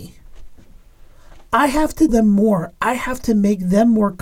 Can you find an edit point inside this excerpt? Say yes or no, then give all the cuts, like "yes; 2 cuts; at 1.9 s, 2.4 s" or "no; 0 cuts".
yes; 1 cut; at 2.1 s